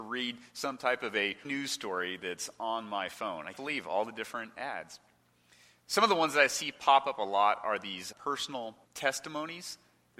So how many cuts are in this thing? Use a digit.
4